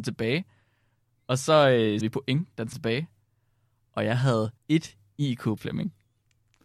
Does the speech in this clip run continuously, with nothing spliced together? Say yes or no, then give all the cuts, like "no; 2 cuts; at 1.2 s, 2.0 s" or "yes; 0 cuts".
no; 4 cuts; at 2.0 s, 2.7 s, 4.6 s, 5.6 s